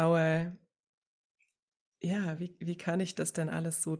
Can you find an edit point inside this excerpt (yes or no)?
no